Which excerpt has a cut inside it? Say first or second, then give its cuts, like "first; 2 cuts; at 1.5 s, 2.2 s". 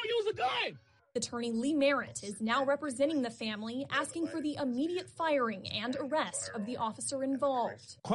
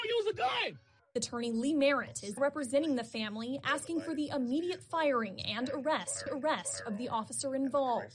second; 2 cuts; at 2.4 s, 6.3 s